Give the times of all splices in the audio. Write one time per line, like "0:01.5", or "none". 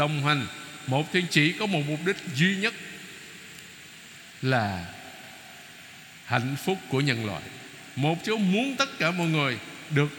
0:01.3
0:08.2
0:08.8